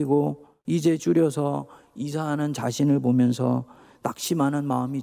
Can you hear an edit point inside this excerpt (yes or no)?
yes